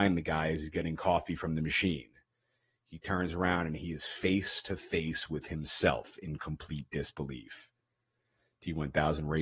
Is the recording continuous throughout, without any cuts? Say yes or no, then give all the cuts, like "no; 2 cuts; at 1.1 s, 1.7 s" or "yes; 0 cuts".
yes; 0 cuts